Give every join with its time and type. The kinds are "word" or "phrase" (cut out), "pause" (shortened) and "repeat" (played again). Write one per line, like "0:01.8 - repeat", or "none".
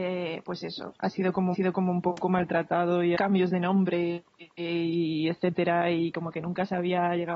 0:01.5 - repeat
0:03.2 - phrase

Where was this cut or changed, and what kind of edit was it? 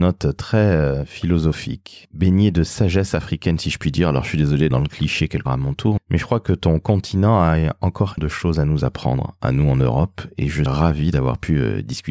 0:04.7 - word
0:05.5 - word
0:06.0 - word
0:08.2 - word
0:10.7 - word

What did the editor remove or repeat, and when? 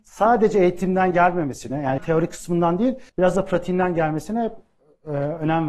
0:02.0 - word
0:03.1 - pause

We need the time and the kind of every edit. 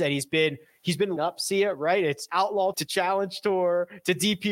0:01.2 - word
0:02.3 - word
0:02.7 - word

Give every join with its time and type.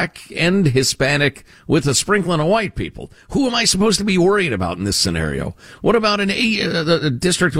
none

